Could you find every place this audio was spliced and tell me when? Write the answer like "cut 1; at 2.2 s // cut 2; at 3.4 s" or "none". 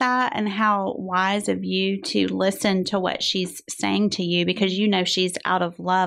none